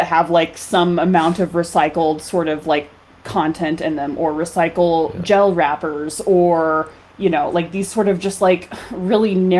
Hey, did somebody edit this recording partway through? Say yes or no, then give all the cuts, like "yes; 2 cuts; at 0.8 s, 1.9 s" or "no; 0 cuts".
no; 0 cuts